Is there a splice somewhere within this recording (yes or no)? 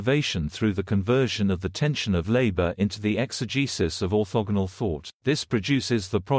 yes